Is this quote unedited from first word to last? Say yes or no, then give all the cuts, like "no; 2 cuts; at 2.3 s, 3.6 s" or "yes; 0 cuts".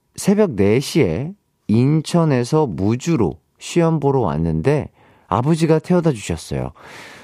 yes; 0 cuts